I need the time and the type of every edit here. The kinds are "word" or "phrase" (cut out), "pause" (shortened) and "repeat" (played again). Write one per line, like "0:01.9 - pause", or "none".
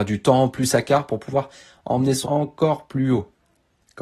0:02.2 - word